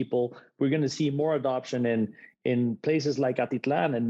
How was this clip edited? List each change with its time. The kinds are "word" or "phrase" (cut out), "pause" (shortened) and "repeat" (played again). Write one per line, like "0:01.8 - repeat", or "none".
none